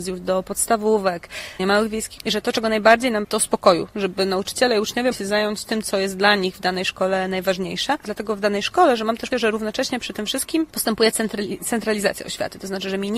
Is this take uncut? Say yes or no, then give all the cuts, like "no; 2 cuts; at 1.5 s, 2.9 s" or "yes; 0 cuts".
no; 6 cuts; at 1.6 s, 2.2 s, 3.2 s, 5.1 s, 8.0 s, 9.3 s